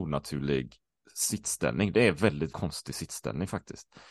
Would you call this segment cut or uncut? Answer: cut